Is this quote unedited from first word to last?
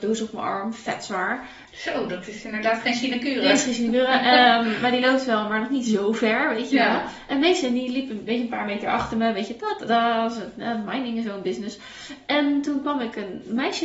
no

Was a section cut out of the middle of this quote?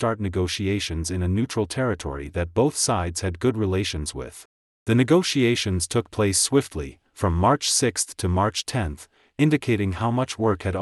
yes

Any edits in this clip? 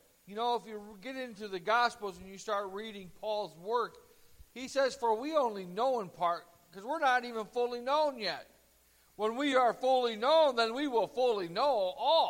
no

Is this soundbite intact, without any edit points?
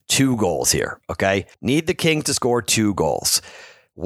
no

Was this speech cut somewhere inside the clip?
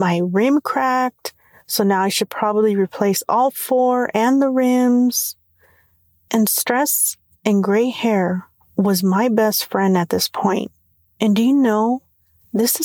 no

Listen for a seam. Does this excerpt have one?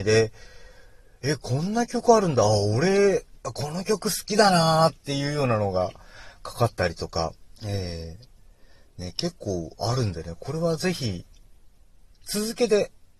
yes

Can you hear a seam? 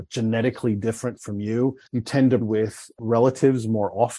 yes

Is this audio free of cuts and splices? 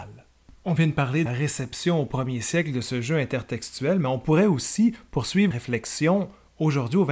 no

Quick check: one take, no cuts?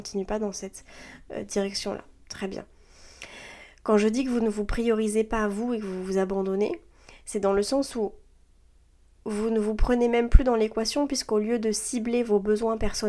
yes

